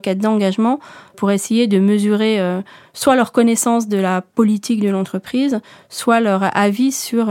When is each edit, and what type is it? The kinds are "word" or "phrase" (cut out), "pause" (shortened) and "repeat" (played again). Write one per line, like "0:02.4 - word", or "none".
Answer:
none